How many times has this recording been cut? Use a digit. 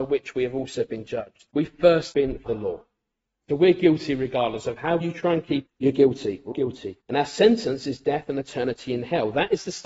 7